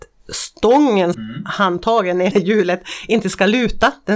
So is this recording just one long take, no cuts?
no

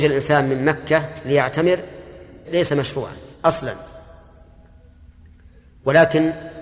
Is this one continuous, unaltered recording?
no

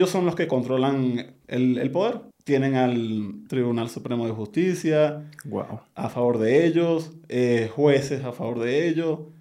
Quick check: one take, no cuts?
no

